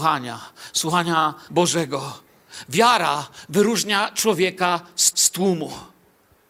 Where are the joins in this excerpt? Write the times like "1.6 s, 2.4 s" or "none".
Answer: 1.5 s, 5.1 s